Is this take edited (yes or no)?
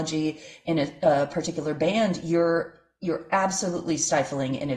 no